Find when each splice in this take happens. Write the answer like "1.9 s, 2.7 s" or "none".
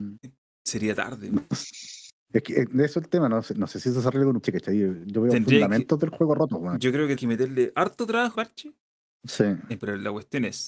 4.4 s, 7.2 s, 8.3 s, 9.8 s